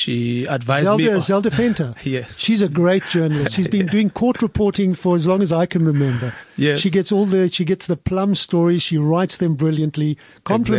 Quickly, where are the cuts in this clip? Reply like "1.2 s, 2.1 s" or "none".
none